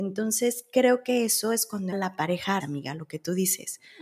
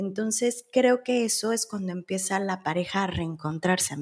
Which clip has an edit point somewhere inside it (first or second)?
first